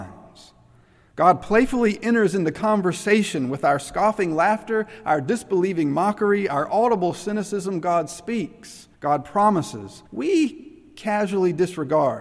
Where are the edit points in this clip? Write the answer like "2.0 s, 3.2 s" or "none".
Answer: 8.9 s, 10.1 s